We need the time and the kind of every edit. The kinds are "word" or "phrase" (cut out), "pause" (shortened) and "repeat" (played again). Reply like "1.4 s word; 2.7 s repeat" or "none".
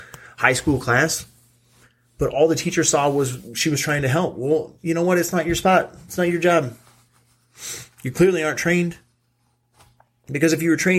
none